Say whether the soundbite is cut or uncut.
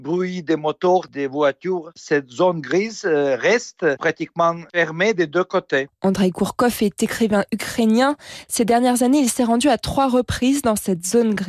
uncut